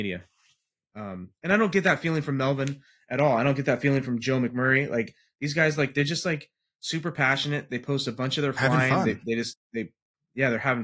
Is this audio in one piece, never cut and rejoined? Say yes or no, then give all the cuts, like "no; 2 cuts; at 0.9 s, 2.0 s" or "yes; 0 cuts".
yes; 0 cuts